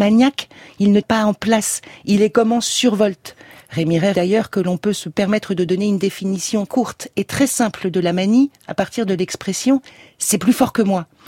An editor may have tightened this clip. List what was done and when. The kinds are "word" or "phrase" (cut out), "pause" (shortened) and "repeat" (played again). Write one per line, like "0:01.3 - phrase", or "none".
0:01.0 - word
0:04.1 - word
0:06.7 - word